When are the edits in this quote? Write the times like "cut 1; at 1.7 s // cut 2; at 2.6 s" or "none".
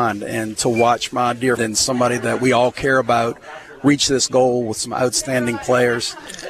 cut 1; at 1.6 s